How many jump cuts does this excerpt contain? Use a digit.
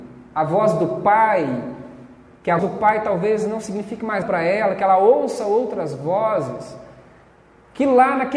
2